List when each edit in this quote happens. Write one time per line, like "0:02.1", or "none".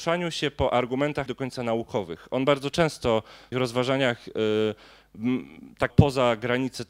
0:01.3
0:03.5
0:05.9